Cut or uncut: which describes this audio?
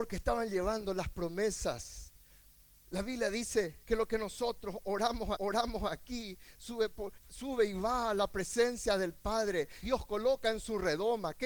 cut